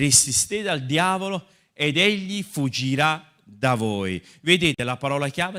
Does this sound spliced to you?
no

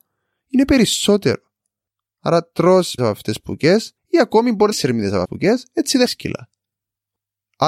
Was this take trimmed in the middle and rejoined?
yes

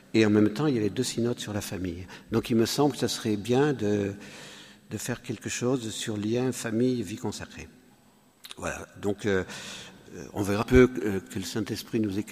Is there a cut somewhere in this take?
yes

